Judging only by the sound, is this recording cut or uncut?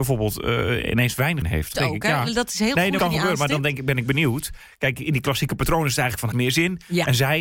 cut